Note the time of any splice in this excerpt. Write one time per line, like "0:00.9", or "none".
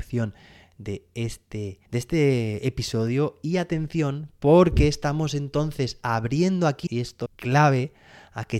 0:01.9
0:06.9
0:07.3